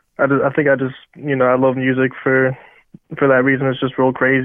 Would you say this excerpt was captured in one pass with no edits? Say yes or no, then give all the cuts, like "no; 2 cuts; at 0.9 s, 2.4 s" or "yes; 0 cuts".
yes; 0 cuts